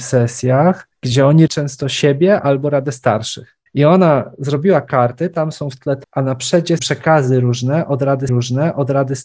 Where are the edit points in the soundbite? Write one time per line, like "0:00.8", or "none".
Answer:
0:00.9
0:01.5
0:03.7
0:06.0
0:06.8
0:08.3